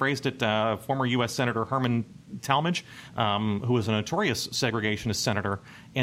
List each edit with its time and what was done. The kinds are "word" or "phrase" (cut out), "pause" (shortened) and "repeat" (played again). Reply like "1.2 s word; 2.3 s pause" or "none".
none